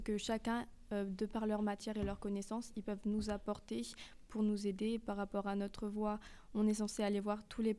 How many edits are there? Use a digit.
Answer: 0